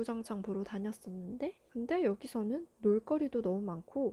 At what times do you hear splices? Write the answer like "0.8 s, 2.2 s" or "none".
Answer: 1.6 s